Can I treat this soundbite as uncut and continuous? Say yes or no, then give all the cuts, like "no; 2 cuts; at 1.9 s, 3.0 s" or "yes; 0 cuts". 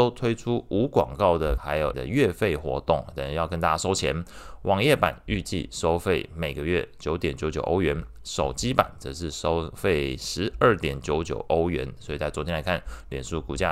no; 2 cuts; at 1.6 s, 1.9 s